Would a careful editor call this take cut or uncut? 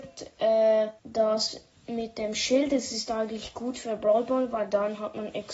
cut